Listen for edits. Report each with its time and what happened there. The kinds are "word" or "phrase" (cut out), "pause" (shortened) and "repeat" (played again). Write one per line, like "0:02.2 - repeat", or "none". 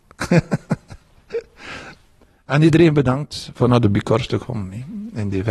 none